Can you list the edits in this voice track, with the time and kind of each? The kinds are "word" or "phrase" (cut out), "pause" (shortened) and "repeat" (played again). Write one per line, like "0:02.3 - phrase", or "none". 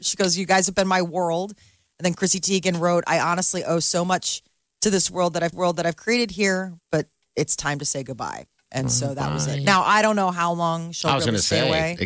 0:05.5 - repeat